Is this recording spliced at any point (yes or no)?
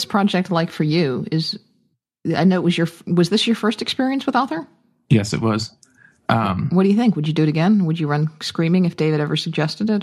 yes